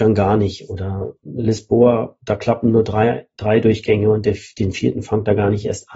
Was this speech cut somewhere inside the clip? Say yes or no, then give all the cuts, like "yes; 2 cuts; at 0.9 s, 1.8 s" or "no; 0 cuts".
yes; 1 cut; at 1.2 s